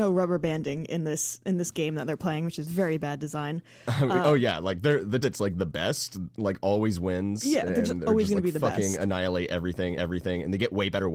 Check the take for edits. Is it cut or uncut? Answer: cut